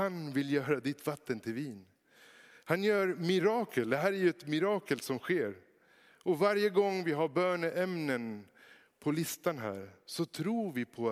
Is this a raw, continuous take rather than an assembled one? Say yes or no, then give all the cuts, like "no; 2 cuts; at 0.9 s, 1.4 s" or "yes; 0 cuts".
yes; 0 cuts